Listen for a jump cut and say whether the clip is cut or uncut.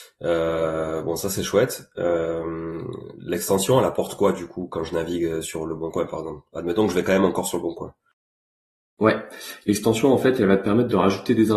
uncut